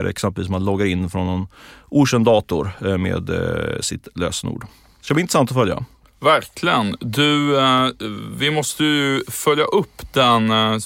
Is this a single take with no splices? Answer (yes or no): yes